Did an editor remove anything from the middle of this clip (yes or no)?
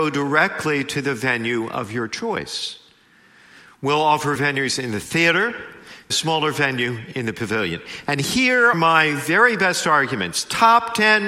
yes